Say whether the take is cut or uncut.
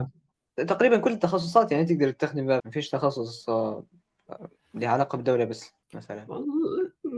cut